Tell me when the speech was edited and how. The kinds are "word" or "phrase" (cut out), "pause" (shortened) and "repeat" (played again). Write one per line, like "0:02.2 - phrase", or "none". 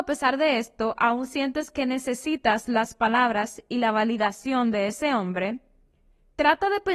none